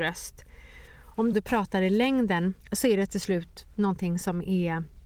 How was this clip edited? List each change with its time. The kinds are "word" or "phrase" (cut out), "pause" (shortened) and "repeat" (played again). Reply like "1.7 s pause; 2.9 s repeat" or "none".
1.3 s phrase; 2.6 s pause